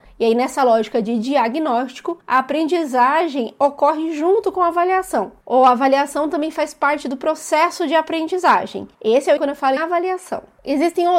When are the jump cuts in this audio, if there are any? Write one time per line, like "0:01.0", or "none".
0:02.2
0:08.9
0:09.4
0:09.8